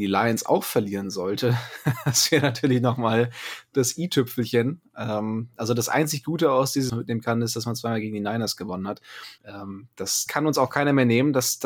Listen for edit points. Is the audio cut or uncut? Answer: cut